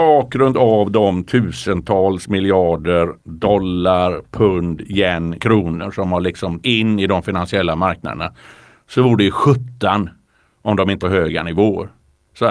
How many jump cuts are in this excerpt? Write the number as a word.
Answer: four